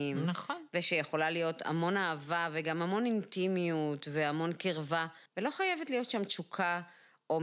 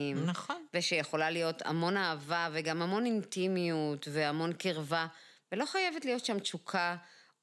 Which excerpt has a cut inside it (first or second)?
first